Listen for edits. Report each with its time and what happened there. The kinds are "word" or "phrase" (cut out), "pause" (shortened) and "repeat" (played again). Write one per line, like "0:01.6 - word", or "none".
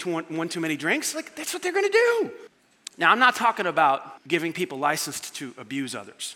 0:02.5 - pause
0:04.2 - pause